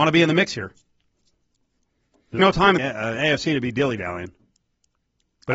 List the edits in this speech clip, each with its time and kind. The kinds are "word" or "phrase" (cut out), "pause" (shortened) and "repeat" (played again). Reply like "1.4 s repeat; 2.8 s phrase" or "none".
2.4 s word; 2.8 s word